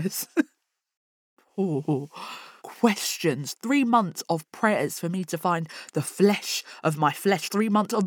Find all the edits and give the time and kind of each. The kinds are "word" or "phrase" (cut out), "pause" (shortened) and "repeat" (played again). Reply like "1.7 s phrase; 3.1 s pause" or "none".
2.6 s phrase